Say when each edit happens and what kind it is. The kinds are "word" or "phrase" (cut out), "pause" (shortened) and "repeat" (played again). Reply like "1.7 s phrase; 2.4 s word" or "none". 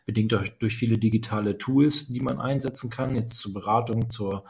none